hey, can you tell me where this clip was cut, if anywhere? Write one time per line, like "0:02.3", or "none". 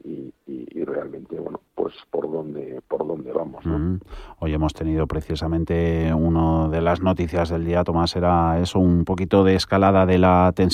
none

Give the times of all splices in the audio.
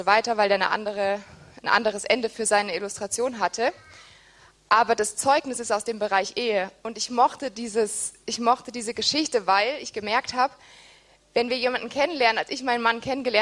none

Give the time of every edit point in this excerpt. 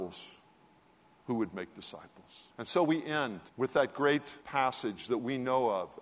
0:02.5
0:03.5
0:04.4

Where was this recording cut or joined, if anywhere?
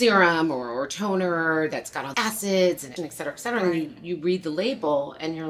0:02.1
0:03.0

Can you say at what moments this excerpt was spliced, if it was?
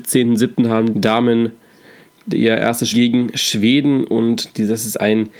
0:00.9
0:02.9

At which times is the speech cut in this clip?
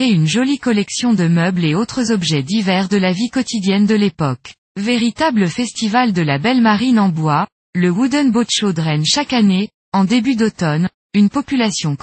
0:04.6

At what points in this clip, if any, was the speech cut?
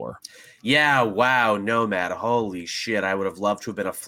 none

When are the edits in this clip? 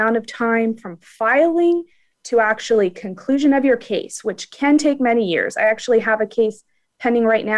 none

